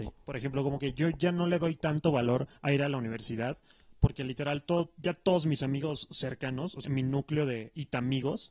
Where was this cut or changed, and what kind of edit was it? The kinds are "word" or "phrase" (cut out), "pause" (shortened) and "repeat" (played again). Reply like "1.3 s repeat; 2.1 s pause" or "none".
2.6 s pause; 6.8 s word